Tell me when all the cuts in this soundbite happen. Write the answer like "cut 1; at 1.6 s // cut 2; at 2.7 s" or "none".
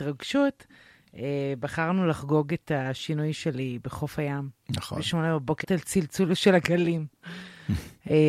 cut 1; at 5.6 s